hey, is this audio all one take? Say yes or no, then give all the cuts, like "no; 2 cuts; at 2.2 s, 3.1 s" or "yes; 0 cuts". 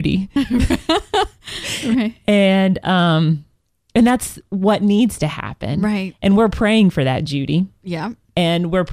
yes; 0 cuts